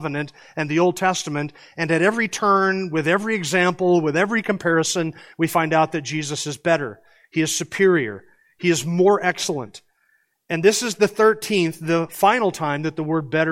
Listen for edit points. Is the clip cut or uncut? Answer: uncut